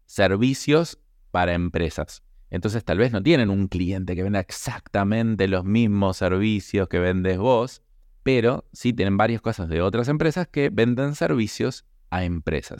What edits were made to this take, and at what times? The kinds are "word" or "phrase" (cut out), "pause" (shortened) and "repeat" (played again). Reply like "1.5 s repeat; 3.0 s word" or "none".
none